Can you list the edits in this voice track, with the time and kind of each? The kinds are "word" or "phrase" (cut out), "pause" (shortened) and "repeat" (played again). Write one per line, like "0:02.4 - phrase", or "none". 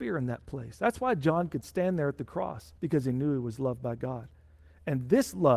0:02.8 - pause